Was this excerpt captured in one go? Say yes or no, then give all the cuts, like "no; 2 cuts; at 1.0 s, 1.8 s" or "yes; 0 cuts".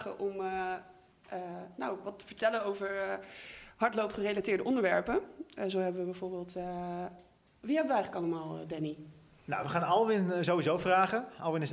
yes; 0 cuts